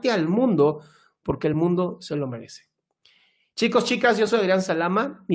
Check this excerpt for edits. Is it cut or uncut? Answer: uncut